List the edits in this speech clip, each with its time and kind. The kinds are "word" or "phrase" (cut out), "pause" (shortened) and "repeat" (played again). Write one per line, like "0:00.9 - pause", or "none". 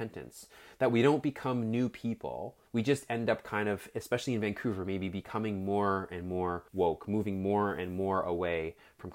0:02.7 - pause
0:06.7 - pause